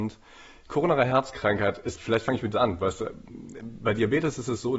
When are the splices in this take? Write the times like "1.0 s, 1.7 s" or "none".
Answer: 2.0 s, 2.5 s